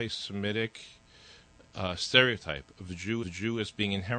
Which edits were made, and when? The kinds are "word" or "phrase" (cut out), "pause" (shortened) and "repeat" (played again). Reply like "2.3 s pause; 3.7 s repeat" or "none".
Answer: 3.2 s repeat